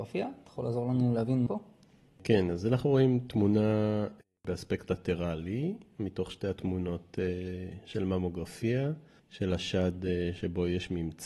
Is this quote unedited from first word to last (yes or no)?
no